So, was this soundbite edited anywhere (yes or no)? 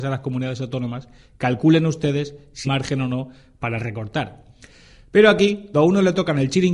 yes